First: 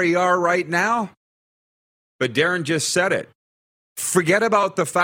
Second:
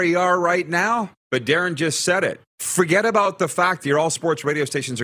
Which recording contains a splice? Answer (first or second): second